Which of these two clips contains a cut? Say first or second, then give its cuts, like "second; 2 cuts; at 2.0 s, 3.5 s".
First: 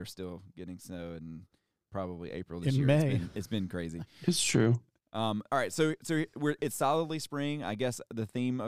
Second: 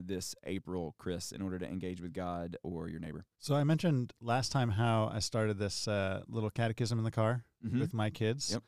second; 2 cuts; at 2.6 s, 3.3 s